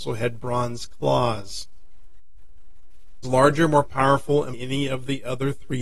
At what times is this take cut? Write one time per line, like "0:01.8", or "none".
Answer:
0:03.2
0:04.5